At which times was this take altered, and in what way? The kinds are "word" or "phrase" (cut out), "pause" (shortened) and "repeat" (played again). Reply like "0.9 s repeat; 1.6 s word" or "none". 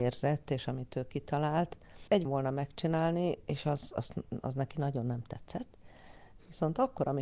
2.3 s phrase